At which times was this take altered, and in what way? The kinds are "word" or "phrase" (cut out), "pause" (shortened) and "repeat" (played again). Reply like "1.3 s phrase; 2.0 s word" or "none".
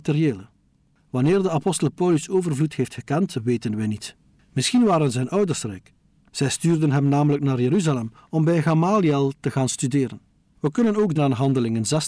11.1 s word